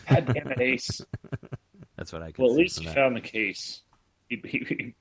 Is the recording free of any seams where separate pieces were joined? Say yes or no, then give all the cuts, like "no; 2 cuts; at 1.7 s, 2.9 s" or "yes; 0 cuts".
yes; 0 cuts